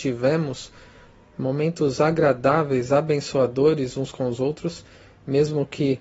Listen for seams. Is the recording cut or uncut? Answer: uncut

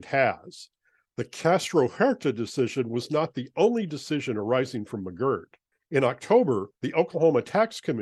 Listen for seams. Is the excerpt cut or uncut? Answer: uncut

